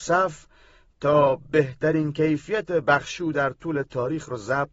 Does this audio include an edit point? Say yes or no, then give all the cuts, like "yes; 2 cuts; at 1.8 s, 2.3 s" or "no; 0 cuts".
no; 0 cuts